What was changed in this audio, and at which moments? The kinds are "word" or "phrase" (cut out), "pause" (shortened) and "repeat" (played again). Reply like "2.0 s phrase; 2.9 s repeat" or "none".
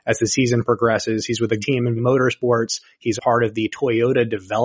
1.6 s word; 2.0 s word; 3.2 s word